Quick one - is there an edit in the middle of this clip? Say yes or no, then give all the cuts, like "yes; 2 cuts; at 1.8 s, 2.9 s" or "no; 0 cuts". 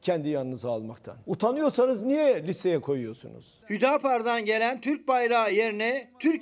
no; 0 cuts